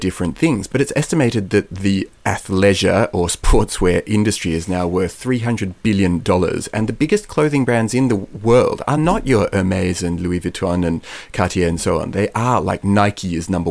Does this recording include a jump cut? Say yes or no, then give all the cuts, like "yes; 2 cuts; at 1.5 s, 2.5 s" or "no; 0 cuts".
no; 0 cuts